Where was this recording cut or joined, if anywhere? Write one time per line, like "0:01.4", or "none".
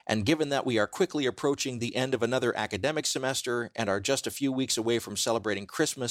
none